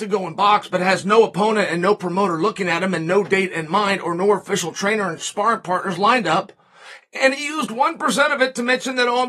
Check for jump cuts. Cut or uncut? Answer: uncut